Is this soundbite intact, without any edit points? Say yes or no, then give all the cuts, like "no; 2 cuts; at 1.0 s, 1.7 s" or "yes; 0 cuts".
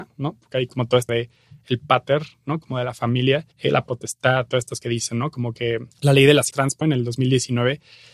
no; 7 cuts; at 1.1 s, 3.5 s, 3.9 s, 4.8 s, 5.9 s, 6.5 s, 6.8 s